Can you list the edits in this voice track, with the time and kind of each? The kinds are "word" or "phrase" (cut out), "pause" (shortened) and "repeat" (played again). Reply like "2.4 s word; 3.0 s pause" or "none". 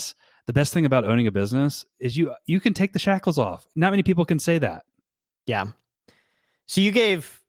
none